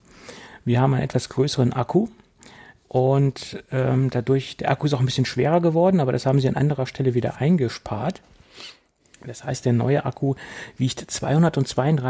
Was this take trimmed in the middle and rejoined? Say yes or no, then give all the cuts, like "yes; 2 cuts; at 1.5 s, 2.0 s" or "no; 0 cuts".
no; 0 cuts